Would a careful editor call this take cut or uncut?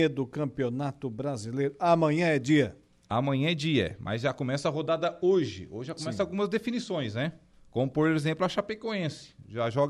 uncut